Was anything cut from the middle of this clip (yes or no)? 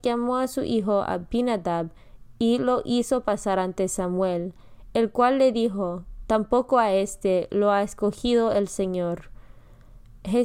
no